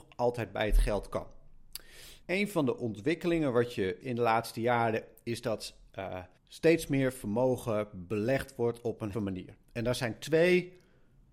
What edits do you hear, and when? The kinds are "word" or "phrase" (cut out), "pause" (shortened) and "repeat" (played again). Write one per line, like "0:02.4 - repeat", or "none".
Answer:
0:02.2 - pause
0:04.0 - word
0:06.4 - pause
0:09.1 - phrase